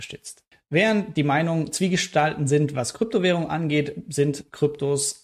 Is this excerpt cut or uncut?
uncut